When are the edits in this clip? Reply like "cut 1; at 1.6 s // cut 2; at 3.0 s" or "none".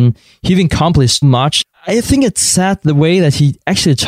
cut 1; at 1.2 s